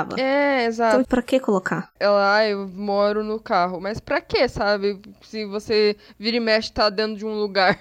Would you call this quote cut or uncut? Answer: cut